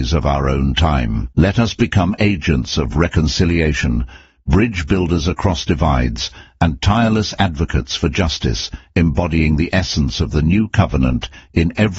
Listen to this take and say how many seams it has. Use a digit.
1